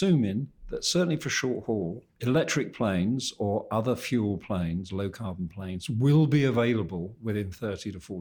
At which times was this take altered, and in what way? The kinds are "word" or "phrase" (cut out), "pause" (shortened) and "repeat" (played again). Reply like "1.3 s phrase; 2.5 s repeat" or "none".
2.1 s pause